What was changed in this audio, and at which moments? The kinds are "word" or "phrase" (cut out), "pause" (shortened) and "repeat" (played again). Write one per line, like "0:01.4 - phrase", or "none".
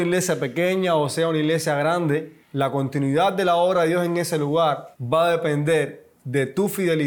0:02.4 - pause